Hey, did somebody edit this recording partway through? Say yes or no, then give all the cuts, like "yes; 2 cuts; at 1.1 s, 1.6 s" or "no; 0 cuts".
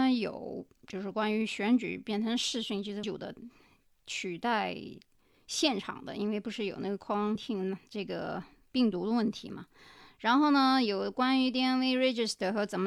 yes; 2 cuts; at 3.0 s, 7.4 s